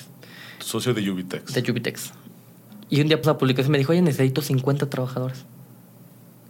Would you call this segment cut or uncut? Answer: cut